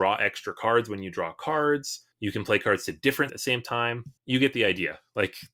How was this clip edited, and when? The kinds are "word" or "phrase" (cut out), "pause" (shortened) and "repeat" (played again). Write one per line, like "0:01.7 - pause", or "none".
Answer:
0:02.1 - pause
0:03.3 - word
0:04.2 - pause